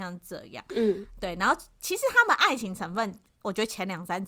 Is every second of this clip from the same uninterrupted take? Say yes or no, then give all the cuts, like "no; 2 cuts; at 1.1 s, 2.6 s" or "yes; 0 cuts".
yes; 0 cuts